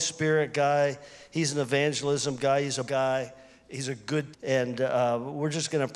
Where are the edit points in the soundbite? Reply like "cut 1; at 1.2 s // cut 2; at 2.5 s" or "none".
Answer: cut 1; at 2.8 s // cut 2; at 4.3 s